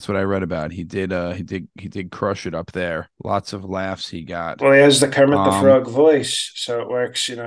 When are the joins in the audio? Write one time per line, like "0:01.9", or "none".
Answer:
0:03.1